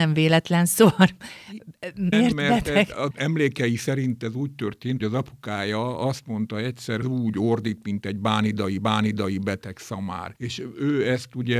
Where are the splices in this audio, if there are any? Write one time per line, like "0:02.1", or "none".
0:02.1
0:03.1
0:05.0
0:07.0
0:08.8
0:10.4